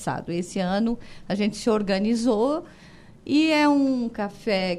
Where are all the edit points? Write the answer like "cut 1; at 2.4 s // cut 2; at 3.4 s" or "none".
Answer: none